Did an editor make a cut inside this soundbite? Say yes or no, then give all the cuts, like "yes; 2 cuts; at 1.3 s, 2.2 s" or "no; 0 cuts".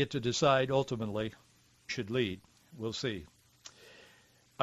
yes; 1 cut; at 1.9 s